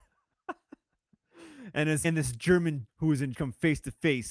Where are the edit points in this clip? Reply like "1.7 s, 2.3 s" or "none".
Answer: 2.0 s, 2.9 s, 3.3 s